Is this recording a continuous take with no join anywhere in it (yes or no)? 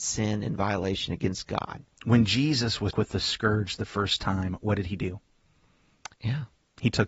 no